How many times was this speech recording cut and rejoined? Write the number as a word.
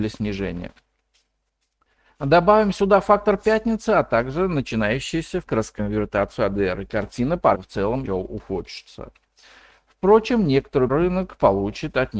four